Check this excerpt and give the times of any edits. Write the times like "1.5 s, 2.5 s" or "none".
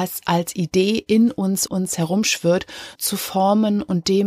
1.7 s, 3.0 s